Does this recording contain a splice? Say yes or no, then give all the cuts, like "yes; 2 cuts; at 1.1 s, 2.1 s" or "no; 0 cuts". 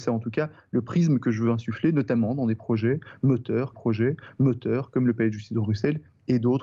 yes; 1 cut; at 3.7 s